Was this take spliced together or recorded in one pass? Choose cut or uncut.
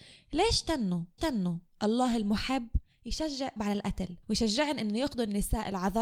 cut